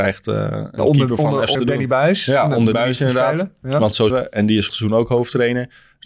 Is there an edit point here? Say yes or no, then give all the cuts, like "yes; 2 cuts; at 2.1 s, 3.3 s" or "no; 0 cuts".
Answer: yes; 4 cuts; at 1.5 s, 2.7 s, 4.1 s, 4.7 s